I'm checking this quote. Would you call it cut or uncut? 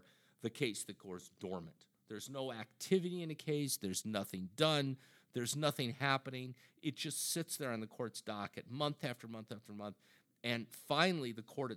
uncut